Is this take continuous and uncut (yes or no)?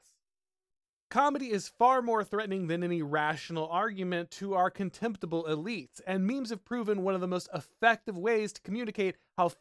yes